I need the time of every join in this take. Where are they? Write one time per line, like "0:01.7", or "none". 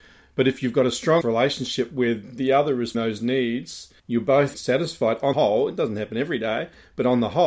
0:01.2
0:02.9
0:04.0
0:04.5
0:05.3